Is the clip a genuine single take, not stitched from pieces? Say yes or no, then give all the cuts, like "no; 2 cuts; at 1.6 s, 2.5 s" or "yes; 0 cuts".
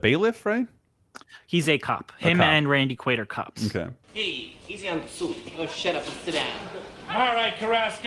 yes; 0 cuts